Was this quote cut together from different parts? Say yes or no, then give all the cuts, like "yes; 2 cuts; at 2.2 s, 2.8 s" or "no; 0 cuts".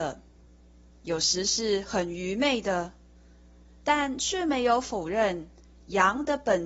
no; 0 cuts